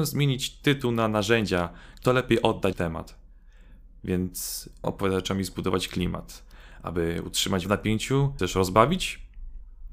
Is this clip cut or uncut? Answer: cut